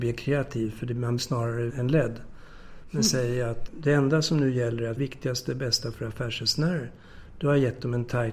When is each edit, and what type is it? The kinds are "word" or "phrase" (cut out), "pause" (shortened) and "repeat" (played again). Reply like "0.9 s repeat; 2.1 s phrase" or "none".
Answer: 1.2 s word; 1.7 s phrase; 3.7 s word; 5.0 s phrase; 5.9 s word